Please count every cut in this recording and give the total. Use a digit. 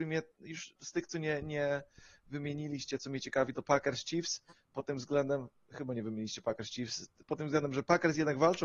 0